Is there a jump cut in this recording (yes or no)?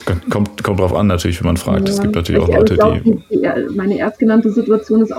no